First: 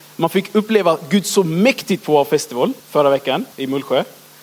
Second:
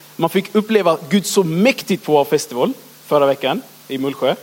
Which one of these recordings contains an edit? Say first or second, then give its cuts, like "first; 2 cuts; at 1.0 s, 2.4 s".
first; 2 cuts; at 2.8 s, 3.5 s